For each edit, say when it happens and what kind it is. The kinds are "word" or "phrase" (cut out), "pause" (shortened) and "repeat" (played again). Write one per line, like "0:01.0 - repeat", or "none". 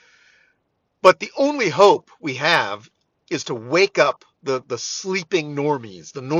none